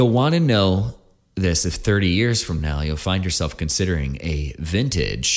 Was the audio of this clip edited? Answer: no; 0 cuts

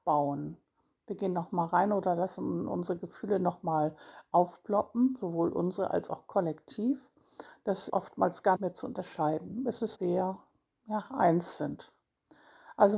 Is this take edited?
yes; 3 cuts; at 7.9 s, 8.6 s, 10.0 s

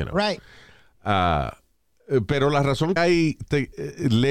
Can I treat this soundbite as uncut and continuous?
no; 1 cut; at 3.0 s

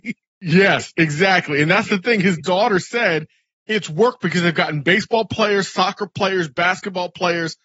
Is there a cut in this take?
no; 0 cuts

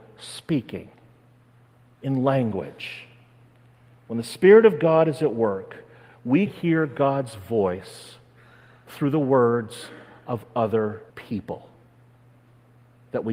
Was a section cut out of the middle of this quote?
yes; 2 cuts; at 6.5 s, 11.1 s

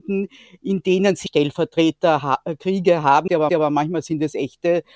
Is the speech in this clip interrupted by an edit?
yes; 2 cuts; at 1.3 s, 3.5 s

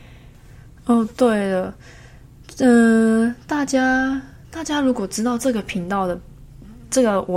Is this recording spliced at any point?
no; 0 cuts

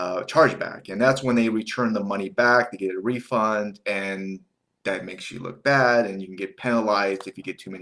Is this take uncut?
yes; 0 cuts

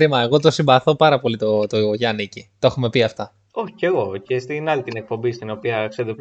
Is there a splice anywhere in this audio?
no; 0 cuts

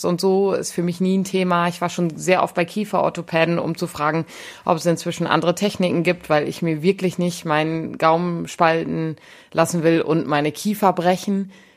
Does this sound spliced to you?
no; 0 cuts

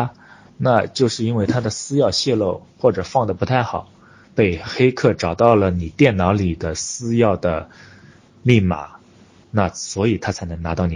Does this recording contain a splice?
no; 0 cuts

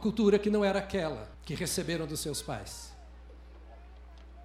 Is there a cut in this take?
yes; 1 cut; at 1.3 s

